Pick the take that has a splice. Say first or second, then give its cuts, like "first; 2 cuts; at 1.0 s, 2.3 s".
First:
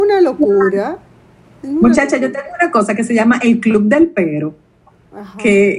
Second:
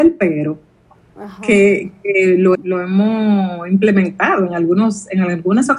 second; 1 cut; at 2.5 s